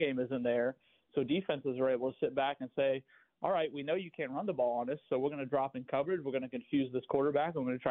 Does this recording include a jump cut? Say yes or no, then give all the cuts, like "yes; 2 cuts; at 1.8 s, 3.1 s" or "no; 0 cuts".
no; 0 cuts